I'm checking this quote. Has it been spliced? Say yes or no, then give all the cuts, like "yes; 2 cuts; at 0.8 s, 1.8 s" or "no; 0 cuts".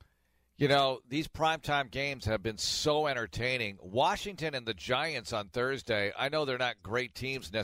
no; 0 cuts